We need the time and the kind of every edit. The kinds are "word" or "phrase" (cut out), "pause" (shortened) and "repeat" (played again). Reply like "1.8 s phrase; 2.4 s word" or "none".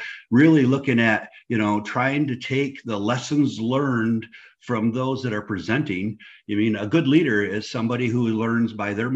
none